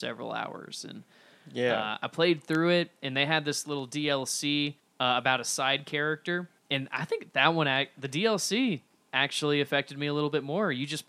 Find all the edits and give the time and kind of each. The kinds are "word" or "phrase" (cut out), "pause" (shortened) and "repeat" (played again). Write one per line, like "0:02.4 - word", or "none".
0:04.8 - pause
0:06.6 - pause